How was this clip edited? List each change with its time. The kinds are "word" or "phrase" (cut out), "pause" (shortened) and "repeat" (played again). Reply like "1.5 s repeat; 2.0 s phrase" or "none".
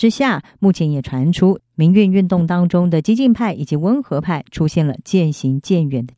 1.7 s pause